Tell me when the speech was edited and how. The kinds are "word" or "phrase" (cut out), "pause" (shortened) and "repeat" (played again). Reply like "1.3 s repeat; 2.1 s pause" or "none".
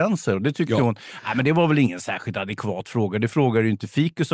none